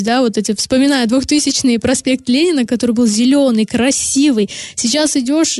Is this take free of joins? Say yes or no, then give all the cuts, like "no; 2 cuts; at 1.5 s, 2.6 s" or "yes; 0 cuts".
yes; 0 cuts